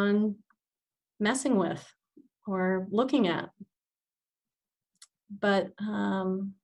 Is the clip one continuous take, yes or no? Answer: yes